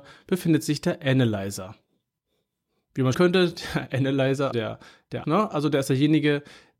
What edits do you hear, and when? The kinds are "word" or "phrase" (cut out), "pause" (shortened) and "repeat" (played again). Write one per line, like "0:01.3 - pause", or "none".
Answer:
0:02.2 - pause
0:03.1 - phrase
0:04.5 - word
0:05.2 - word